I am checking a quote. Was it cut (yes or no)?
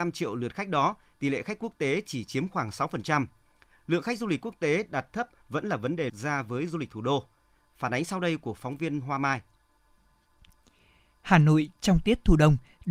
yes